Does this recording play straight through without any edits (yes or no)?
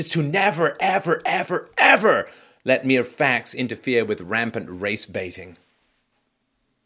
yes